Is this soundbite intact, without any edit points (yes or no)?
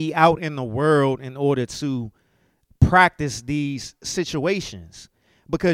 yes